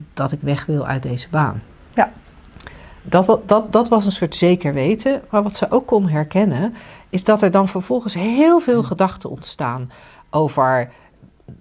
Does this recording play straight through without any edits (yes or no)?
yes